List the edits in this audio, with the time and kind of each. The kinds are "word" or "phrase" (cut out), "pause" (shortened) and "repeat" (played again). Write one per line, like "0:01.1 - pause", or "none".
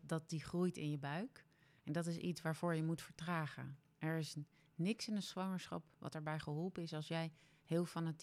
none